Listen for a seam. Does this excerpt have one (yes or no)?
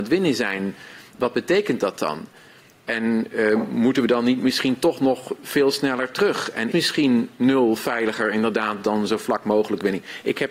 yes